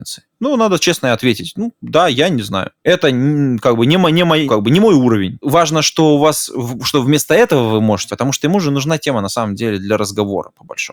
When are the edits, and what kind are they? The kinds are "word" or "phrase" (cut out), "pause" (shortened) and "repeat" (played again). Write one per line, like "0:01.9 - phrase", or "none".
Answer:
0:04.5 - word
0:08.1 - word